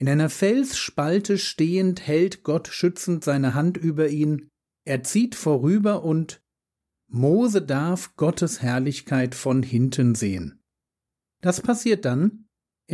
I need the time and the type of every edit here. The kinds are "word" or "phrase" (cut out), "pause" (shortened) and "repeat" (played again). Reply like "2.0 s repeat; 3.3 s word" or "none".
none